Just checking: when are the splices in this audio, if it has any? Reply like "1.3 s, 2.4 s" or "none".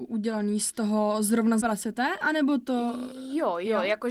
1.6 s